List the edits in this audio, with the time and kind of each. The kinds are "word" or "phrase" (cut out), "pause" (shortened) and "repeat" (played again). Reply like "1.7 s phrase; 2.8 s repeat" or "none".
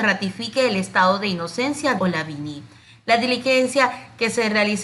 2.0 s word